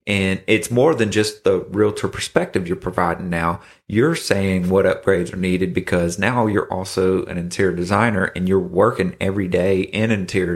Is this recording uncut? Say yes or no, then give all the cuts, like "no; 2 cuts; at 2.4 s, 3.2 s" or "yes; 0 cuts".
yes; 0 cuts